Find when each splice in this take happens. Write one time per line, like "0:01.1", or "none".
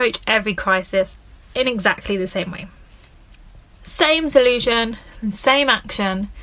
none